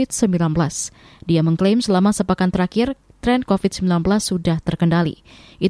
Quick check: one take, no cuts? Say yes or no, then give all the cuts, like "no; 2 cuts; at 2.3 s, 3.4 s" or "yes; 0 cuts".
no; 1 cut; at 3.5 s